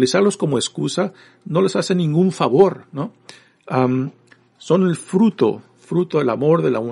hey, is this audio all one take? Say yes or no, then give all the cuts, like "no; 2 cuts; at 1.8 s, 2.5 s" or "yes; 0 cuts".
yes; 0 cuts